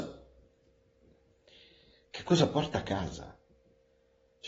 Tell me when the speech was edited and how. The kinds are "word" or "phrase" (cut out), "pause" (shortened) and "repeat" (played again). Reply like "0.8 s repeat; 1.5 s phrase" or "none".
none